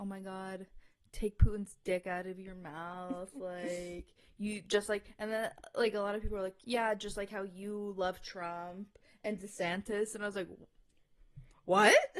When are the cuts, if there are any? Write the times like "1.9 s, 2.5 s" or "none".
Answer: none